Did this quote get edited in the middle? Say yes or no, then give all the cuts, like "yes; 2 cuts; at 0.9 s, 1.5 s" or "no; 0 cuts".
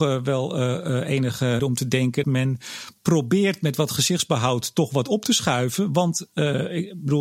yes; 2 cuts; at 1.6 s, 2.2 s